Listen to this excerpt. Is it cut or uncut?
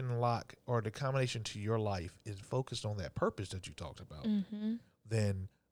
cut